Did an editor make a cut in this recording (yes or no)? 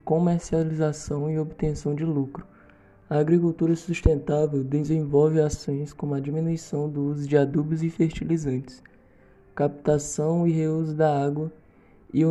no